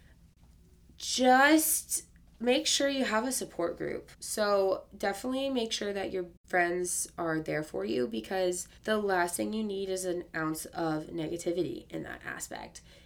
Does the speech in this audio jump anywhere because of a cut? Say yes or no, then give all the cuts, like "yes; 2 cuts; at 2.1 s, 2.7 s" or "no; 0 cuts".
yes; 3 cuts; at 4.1 s, 6.4 s, 8.8 s